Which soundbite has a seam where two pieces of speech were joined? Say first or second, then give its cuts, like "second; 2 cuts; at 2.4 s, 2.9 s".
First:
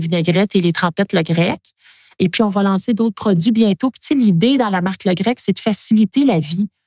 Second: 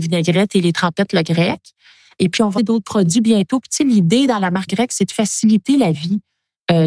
second; 2 cuts; at 2.6 s, 4.7 s